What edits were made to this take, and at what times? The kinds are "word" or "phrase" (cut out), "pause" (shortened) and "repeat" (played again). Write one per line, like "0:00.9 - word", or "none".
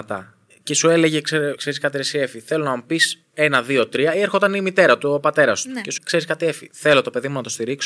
0:01.6 - word
0:06.0 - word